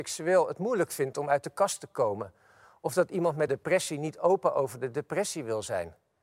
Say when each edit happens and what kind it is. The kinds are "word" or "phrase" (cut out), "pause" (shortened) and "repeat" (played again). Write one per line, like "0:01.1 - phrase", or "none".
0:03.5 - word